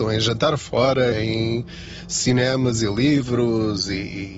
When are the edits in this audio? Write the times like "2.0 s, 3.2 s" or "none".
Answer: 1.1 s

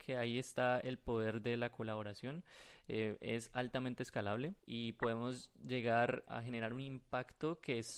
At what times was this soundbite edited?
4.6 s, 6.3 s

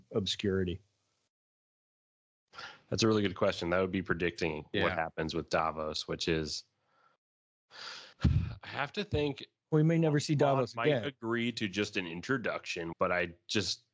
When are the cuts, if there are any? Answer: 8.1 s, 12.9 s

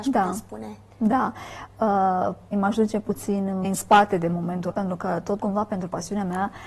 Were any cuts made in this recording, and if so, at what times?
2.5 s, 3.6 s, 4.7 s, 5.4 s

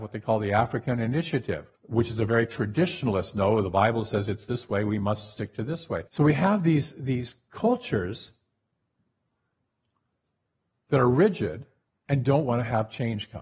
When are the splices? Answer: 1.8 s, 6.1 s

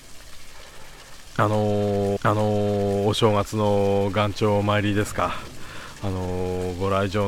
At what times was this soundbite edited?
2.2 s

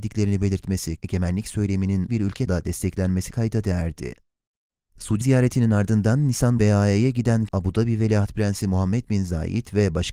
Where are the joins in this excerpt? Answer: 1.0 s, 2.1 s, 2.5 s, 3.3 s, 5.2 s, 6.6 s, 7.5 s

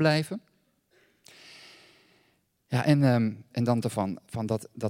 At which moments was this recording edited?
3.5 s, 3.8 s

